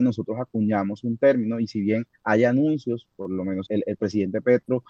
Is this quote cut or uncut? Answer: cut